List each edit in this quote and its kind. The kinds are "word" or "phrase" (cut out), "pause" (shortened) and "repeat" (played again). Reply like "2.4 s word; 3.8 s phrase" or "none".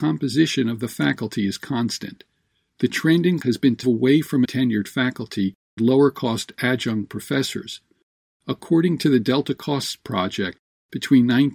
3.4 s word; 3.8 s word; 4.4 s phrase; 5.8 s word